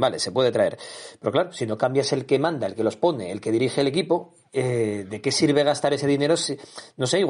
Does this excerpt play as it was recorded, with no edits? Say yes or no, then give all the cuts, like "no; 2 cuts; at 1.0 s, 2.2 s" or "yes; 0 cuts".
yes; 0 cuts